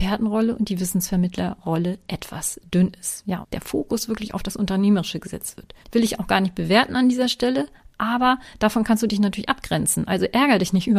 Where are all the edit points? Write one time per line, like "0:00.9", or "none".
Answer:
0:03.4
0:05.8